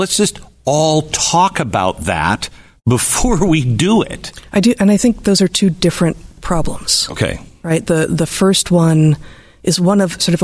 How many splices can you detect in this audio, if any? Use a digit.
0